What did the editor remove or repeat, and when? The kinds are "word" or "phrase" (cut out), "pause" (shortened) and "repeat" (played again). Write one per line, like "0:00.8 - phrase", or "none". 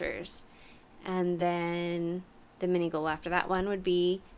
none